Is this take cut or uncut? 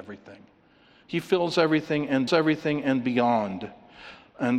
cut